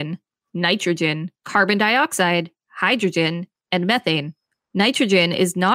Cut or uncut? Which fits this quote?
cut